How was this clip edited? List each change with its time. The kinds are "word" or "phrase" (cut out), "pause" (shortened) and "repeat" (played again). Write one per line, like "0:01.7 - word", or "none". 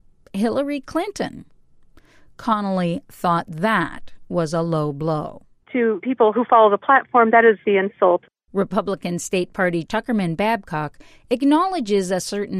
0:06.0 - word
0:06.3 - word
0:07.6 - word
0:09.9 - word